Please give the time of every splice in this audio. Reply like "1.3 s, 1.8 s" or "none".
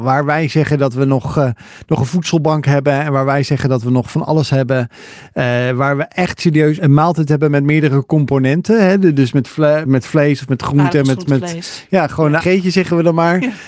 6.8 s, 9.8 s, 12.4 s